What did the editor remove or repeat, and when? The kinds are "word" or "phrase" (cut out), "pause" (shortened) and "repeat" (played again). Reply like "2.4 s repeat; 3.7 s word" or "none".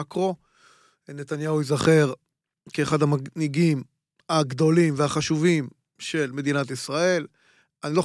none

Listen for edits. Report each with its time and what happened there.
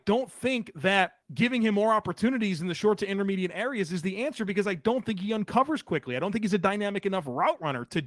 1.2 s pause

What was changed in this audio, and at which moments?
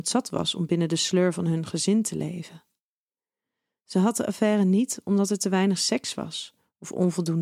none

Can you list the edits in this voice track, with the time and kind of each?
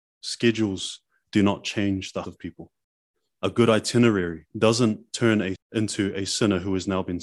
2.2 s word; 4.5 s pause; 5.5 s word

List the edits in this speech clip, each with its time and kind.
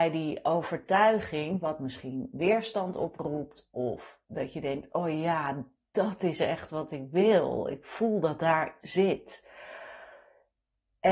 8.8 s word

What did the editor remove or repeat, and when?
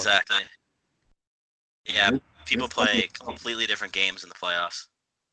none

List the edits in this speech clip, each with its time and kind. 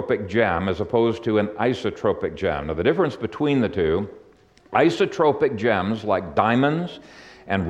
none

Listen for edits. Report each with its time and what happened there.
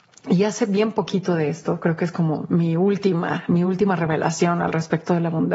none

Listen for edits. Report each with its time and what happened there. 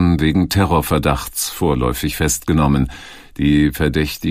none

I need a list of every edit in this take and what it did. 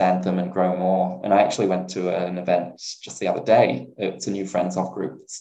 none

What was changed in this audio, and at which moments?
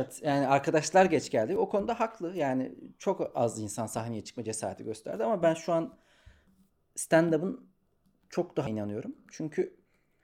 8.7 s word

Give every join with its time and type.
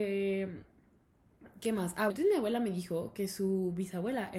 2.1 s word

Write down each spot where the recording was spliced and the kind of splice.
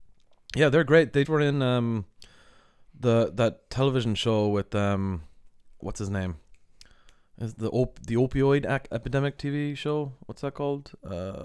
1.2 s word; 5.8 s word; 8.9 s word; 9.4 s word

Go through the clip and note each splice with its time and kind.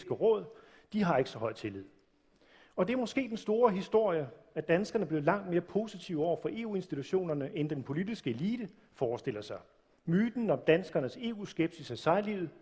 none

